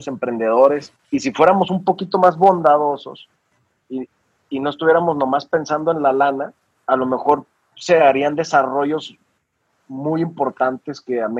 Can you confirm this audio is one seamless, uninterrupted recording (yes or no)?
yes